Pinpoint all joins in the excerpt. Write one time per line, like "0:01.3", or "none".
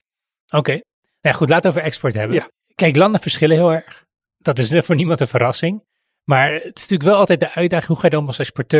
none

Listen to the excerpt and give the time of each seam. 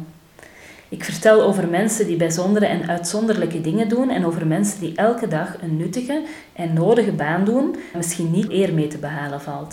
0:07.9
0:08.5

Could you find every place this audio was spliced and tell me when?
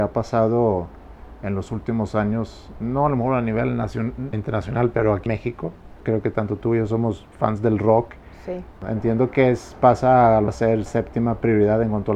0:04.3
0:05.3
0:10.5
0:10.9

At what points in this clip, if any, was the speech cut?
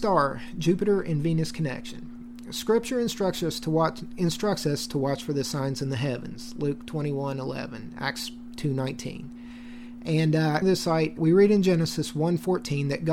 0:10.6
0:11.2

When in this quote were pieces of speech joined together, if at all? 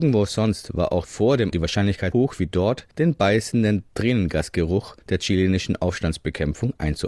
0:01.0
0:01.5
0:02.1
0:02.9
0:05.0

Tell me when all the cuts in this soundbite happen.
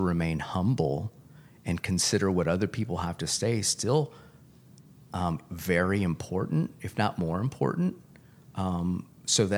none

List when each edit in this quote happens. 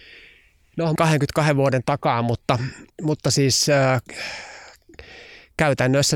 0:01.0
0:02.9

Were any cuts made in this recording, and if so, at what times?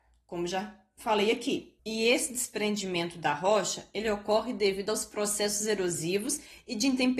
0:01.8

